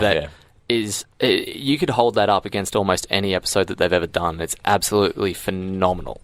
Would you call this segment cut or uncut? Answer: uncut